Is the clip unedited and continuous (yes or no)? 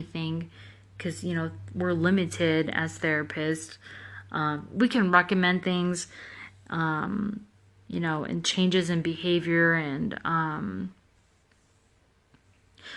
yes